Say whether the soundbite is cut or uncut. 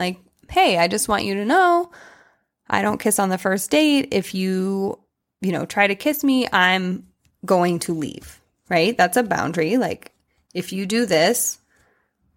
uncut